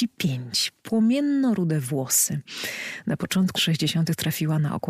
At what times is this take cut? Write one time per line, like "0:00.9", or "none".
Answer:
0:03.6